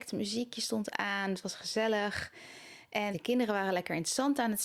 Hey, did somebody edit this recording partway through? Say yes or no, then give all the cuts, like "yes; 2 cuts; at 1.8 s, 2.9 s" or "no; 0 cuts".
yes; 1 cut; at 3.1 s